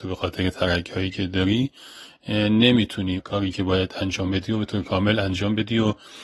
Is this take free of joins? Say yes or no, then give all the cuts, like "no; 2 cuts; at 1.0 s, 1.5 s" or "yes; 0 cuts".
no; 1 cut; at 3.2 s